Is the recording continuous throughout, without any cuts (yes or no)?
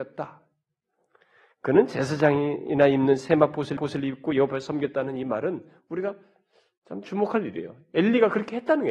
no